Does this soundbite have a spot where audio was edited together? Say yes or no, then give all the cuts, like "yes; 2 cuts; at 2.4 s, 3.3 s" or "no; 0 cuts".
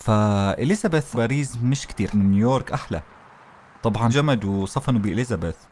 yes; 3 cuts; at 1.1 s, 2.1 s, 4.1 s